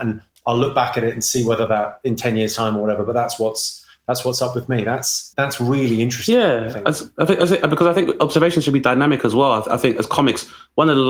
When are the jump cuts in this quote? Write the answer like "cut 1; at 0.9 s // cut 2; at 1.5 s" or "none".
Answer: cut 1; at 5.3 s